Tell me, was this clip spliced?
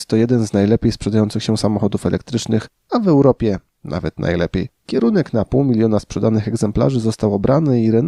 yes; 1 cut; at 4.8 s

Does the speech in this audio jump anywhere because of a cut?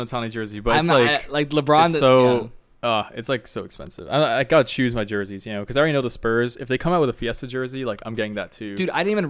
no; 0 cuts

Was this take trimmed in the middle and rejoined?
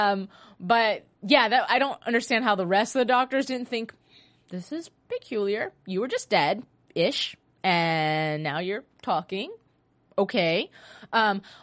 yes; 1 cut; at 1.7 s

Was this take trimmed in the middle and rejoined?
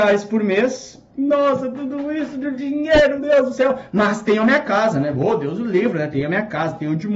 yes; 2 cuts; at 1.1 s, 3.2 s

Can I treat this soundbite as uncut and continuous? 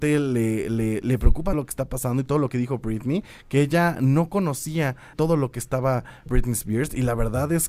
no; 3 cuts; at 1.5 s, 5.1 s, 6.3 s

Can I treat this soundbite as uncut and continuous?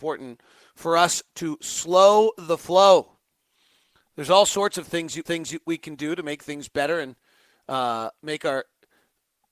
no; 1 cut; at 5.3 s

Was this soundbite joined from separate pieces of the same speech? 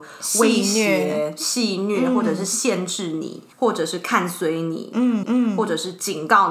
yes; 2 cuts; at 3.5 s, 5.2 s

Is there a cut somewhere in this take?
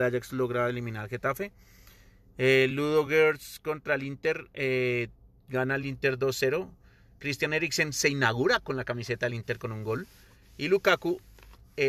no; 0 cuts

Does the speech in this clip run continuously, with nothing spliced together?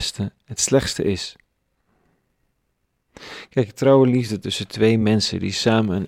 yes; 0 cuts

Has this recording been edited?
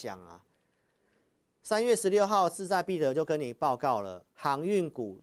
yes; 1 cut; at 4.3 s

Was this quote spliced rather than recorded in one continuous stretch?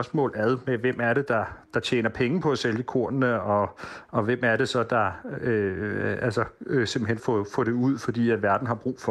yes; 1 cut; at 7.2 s

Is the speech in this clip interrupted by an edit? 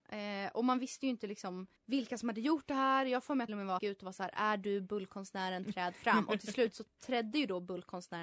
yes; 3 cuts; at 1.8 s, 3.5 s, 3.8 s

